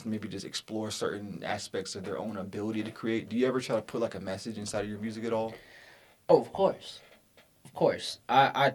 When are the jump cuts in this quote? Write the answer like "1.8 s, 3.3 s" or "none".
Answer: none